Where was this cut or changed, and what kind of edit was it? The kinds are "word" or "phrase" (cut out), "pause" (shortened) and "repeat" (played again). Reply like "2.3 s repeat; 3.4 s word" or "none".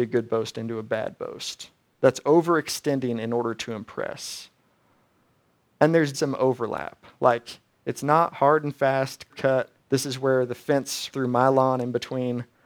6.1 s word; 9.3 s word; 9.7 s pause; 11.1 s word